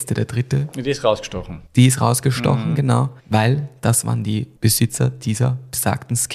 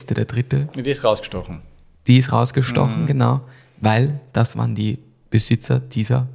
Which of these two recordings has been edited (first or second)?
first